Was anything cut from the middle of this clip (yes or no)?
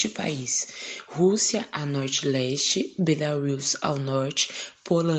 no